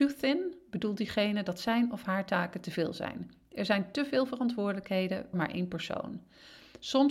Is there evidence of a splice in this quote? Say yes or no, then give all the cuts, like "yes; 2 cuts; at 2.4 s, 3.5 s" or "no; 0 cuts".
yes; 1 cut; at 5.3 s